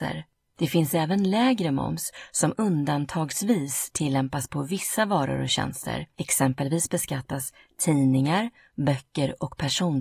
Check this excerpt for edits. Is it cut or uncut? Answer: uncut